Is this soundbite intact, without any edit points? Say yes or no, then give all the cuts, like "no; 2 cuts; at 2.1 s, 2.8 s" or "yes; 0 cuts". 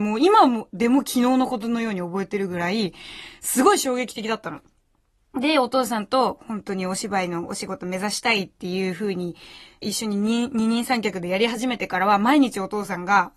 no; 1 cut; at 9.8 s